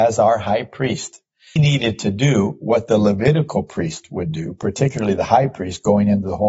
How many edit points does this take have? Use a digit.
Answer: 1